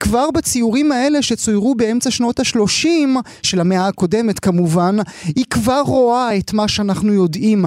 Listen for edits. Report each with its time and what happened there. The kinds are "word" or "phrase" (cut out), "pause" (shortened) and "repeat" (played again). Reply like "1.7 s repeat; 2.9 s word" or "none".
none